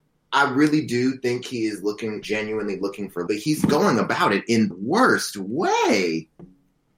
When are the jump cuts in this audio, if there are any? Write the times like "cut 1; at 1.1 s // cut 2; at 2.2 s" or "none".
cut 1; at 2.2 s // cut 2; at 3.3 s // cut 3; at 4.7 s